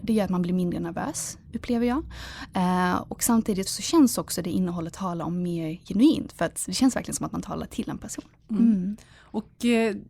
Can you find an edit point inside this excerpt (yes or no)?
yes